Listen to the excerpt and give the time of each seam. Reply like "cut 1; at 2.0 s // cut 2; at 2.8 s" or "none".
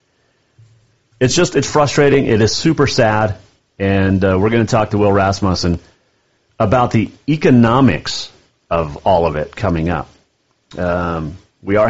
none

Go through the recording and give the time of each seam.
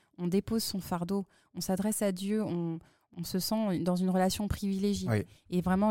none

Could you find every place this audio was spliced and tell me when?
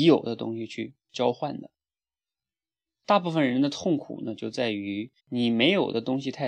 cut 1; at 5.2 s

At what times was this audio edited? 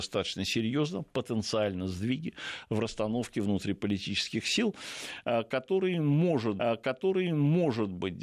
cut 1; at 6.6 s

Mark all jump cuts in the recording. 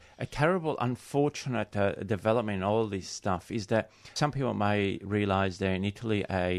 none

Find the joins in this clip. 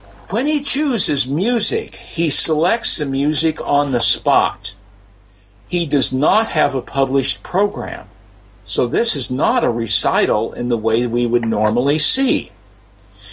none

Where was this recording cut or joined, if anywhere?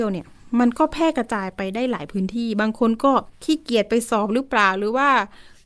cut 1; at 3.3 s

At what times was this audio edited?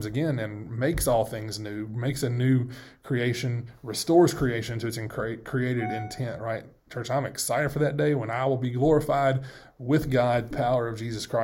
cut 1; at 10.5 s

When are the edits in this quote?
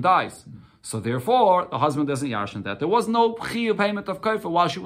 cut 1; at 3.8 s

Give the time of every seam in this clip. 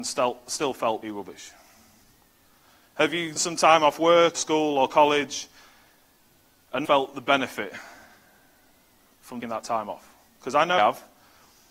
cut 1; at 1.0 s // cut 2; at 3.4 s // cut 3; at 4.3 s // cut 4; at 6.8 s // cut 5; at 9.4 s // cut 6; at 10.8 s

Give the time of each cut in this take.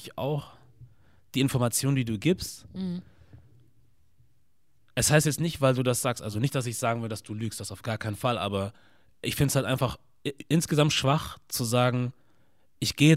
none

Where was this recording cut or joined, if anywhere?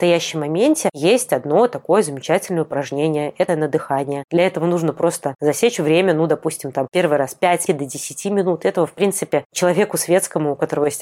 cut 1; at 3.5 s // cut 2; at 7.7 s

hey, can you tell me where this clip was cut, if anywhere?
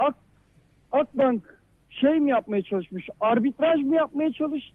none

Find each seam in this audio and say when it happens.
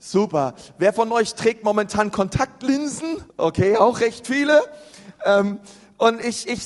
cut 1; at 3.3 s

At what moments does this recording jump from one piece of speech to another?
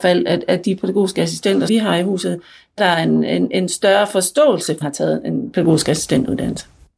cut 1; at 1.7 s // cut 2; at 2.8 s // cut 3; at 4.8 s

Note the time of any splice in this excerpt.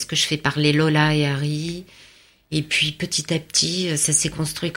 none

